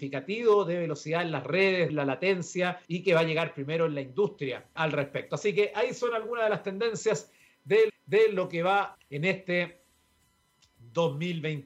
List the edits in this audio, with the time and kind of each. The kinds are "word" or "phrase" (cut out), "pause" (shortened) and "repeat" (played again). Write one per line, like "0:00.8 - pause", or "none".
0:01.9 - word
0:02.8 - pause
0:04.8 - word
0:07.9 - repeat
0:08.9 - word